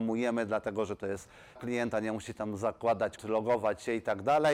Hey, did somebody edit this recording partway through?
yes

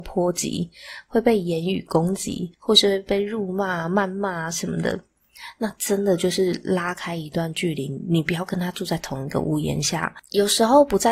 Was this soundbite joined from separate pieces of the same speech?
yes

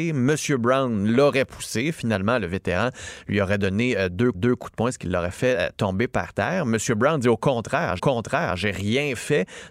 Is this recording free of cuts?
no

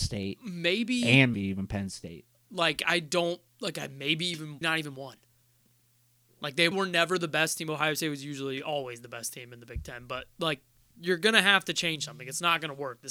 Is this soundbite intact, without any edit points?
no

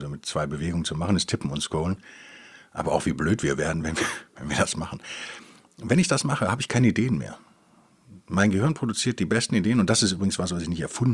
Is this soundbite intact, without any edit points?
yes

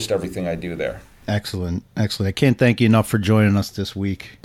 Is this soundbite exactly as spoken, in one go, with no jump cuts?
yes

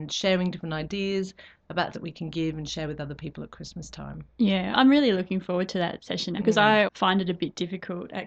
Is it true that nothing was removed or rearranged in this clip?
no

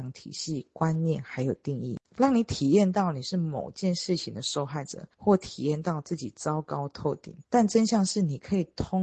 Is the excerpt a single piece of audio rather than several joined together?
no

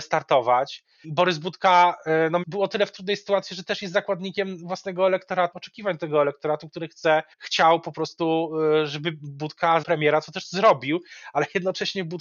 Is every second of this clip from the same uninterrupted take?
no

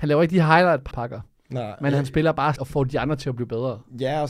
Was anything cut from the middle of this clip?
yes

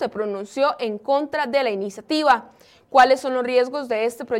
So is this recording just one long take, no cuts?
yes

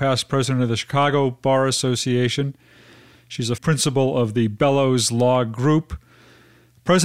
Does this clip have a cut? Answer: yes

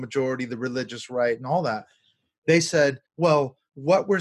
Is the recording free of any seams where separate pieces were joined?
no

